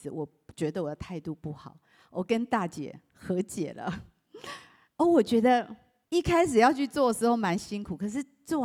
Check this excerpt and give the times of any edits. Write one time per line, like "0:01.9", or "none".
0:06.0